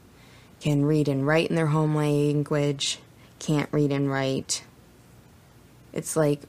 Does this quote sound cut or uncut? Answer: uncut